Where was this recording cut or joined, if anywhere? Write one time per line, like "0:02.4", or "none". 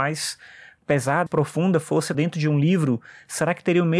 0:01.3
0:02.1